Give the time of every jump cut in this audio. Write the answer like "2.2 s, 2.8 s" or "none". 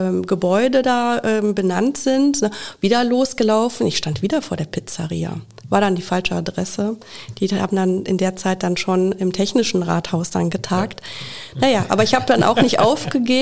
none